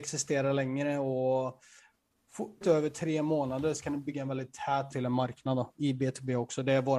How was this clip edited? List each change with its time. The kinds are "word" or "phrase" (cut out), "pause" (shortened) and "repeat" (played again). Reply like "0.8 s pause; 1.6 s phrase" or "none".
2.6 s word; 4.9 s word